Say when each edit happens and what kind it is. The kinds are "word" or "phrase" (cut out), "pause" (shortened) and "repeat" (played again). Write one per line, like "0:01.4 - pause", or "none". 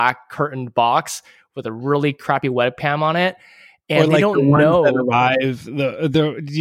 none

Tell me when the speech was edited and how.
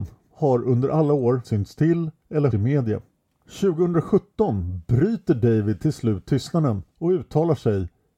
0:01.4 - word
0:02.5 - word
0:06.9 - pause

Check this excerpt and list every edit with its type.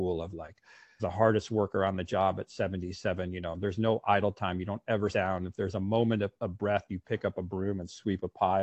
0:01.0 - word
0:05.1 - word
0:06.4 - pause

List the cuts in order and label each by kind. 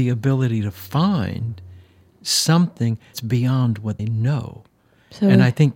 0:03.1 - word
0:04.0 - word

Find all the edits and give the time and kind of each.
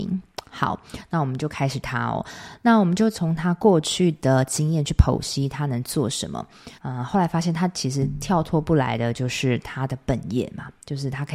0:01.8 - word
0:06.8 - pause

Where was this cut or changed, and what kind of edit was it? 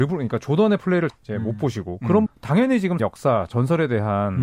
0:01.1 - word
0:02.3 - word
0:03.0 - word

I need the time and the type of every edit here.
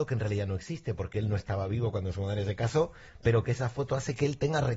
none

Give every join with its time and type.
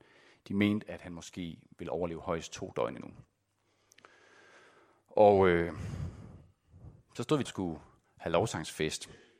0:07.4 - phrase

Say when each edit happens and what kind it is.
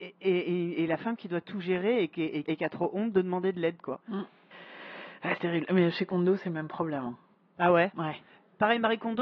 0:02.5 - phrase
0:05.4 - word
0:07.3 - pause

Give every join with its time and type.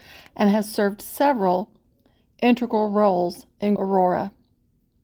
0:03.8 - word

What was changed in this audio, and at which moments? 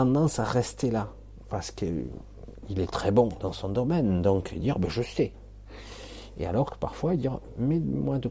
none

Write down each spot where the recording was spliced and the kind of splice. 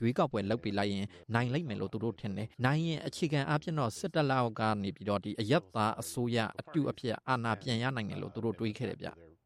0:01.2 - pause
0:02.5 - pause

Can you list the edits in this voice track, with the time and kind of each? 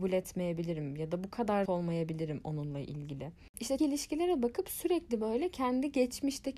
0:01.7 - word
0:03.8 - word

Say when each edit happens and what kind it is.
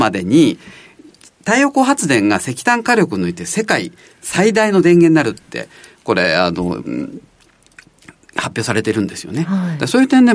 none

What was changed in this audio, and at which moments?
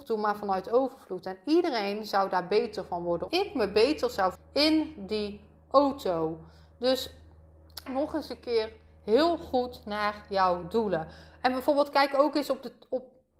0:03.3 - word
0:04.3 - word
0:07.9 - word

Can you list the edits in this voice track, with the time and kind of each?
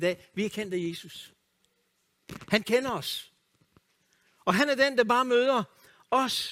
none

